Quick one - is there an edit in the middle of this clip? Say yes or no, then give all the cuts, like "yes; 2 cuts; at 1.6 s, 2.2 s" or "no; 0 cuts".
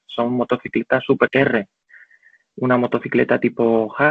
yes; 1 cut; at 1.3 s